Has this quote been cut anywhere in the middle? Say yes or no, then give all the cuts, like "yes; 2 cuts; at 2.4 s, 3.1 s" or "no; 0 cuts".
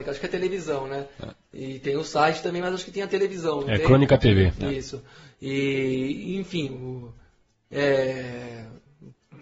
no; 0 cuts